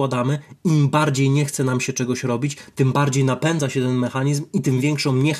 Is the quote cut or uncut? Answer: uncut